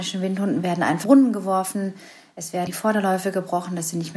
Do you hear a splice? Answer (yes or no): yes